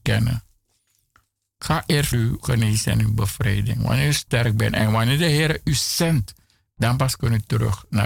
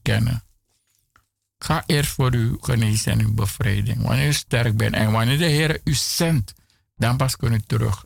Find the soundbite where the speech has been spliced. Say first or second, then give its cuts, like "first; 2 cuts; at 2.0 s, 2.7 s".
first; 1 cut; at 2.1 s